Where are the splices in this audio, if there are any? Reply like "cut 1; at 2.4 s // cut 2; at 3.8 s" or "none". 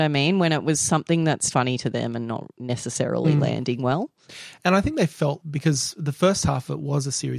cut 1; at 1.5 s // cut 2; at 5.4 s